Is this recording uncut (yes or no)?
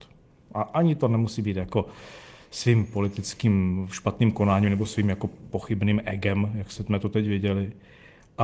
yes